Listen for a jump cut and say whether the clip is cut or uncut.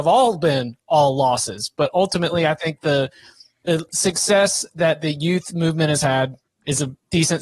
uncut